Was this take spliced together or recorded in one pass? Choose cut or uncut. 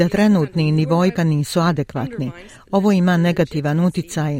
cut